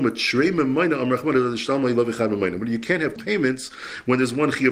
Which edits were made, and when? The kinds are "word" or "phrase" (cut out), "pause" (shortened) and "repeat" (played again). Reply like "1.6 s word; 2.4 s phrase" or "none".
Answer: 3.2 s word

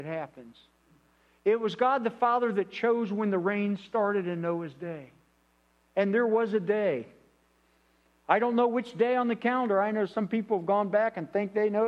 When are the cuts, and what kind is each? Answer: none

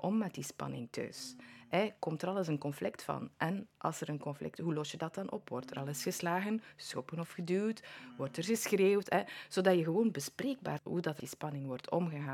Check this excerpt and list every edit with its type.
4.6 s word; 10.8 s word; 11.2 s word

